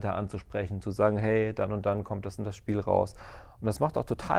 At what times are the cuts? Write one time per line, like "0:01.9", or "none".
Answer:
none